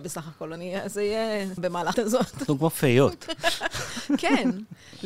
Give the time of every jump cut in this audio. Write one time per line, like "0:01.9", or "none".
0:01.6
0:01.9